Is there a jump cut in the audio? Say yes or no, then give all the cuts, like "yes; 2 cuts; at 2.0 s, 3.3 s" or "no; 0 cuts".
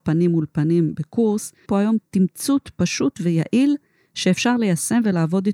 yes; 1 cut; at 1.7 s